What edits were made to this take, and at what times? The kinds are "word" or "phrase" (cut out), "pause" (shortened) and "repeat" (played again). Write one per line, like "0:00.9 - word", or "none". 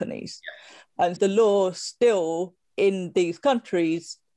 0:01.2 - word
0:02.6 - pause